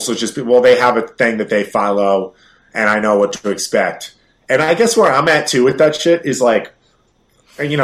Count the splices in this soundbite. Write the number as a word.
zero